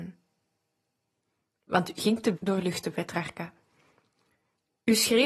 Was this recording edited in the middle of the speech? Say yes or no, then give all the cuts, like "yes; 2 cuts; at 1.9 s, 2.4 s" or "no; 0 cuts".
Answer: yes; 2 cuts; at 2.0 s, 2.3 s